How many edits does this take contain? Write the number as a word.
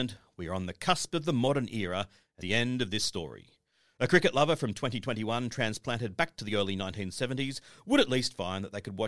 one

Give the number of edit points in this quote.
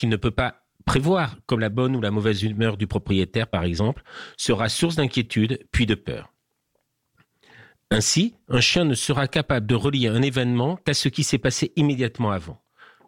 zero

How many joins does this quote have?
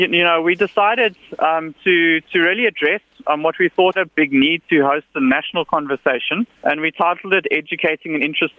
two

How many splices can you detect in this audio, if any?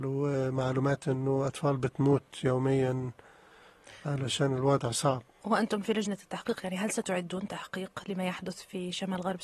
zero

